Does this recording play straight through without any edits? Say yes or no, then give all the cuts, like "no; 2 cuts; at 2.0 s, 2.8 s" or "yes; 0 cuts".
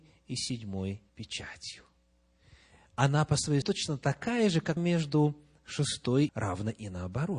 no; 4 cuts; at 1.1 s, 3.6 s, 4.8 s, 6.3 s